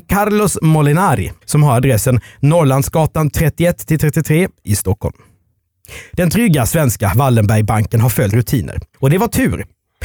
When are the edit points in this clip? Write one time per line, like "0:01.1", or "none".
0:01.4
0:08.3
0:08.9